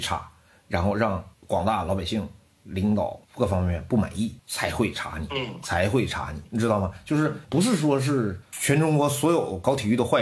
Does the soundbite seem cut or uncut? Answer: cut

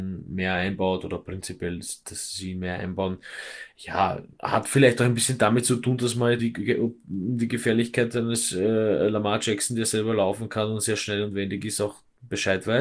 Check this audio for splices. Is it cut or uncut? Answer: cut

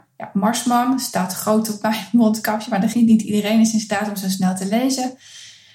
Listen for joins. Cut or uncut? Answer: cut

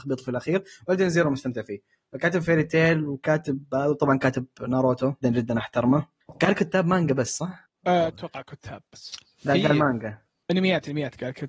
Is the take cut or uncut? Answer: cut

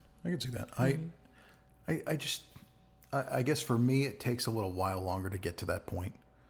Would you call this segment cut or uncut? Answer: uncut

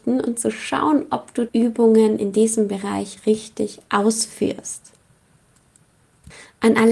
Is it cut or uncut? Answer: cut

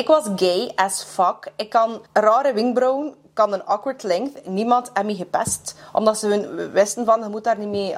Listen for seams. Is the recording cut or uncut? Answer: cut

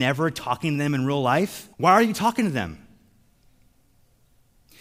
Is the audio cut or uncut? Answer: cut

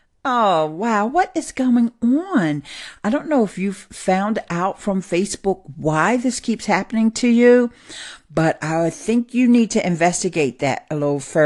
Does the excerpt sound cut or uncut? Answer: uncut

